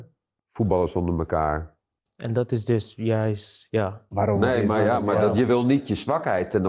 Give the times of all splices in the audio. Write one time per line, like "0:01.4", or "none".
none